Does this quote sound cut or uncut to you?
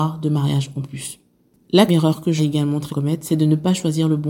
cut